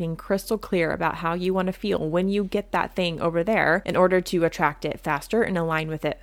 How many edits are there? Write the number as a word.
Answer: zero